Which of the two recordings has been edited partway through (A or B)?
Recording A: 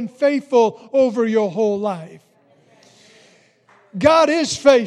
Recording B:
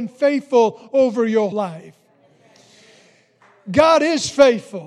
B